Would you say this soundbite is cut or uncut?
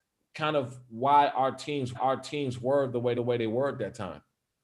cut